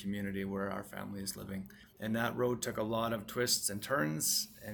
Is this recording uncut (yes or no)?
no